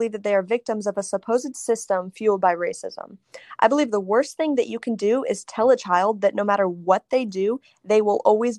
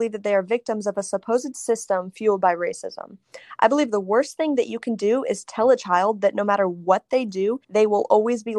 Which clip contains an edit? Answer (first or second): second